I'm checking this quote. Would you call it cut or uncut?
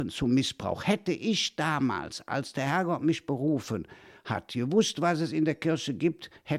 uncut